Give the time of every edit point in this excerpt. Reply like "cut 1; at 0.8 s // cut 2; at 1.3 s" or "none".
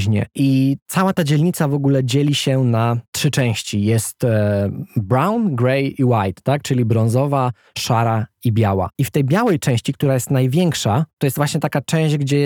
none